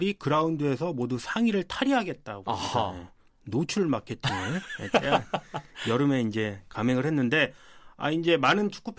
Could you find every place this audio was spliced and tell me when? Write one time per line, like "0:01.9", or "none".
none